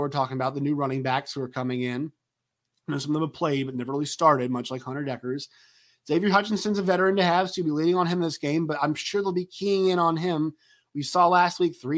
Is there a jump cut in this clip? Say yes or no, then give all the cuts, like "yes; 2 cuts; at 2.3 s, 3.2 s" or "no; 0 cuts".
no; 0 cuts